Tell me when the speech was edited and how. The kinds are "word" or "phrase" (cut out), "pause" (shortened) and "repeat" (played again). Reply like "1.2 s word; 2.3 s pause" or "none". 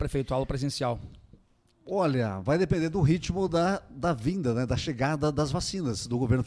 none